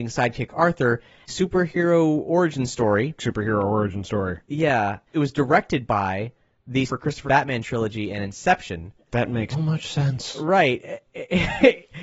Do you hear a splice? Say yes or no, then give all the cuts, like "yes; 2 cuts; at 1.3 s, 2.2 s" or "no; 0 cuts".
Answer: yes; 6 cuts; at 1.3 s, 3.2 s, 5.1 s, 6.9 s, 7.2 s, 9.5 s